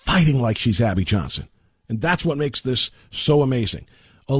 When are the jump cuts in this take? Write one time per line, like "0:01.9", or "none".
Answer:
none